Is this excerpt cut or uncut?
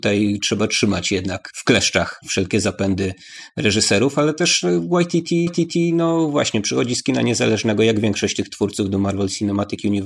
cut